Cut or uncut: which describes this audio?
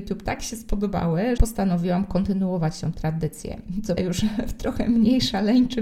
cut